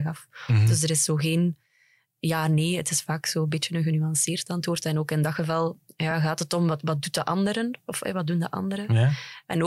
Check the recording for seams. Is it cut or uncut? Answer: uncut